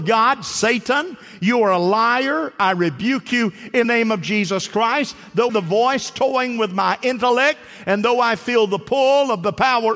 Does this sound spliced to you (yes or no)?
yes